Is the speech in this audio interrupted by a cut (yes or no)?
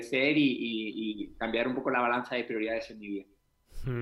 no